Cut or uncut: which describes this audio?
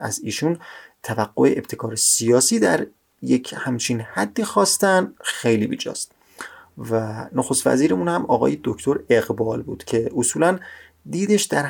uncut